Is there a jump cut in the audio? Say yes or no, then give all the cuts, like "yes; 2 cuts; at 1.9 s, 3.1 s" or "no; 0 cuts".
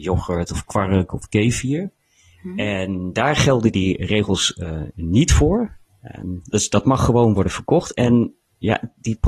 no; 0 cuts